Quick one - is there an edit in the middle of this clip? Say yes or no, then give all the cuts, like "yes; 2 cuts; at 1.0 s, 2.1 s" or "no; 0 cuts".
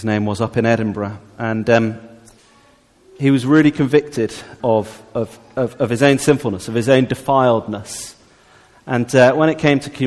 yes; 1 cut; at 4.6 s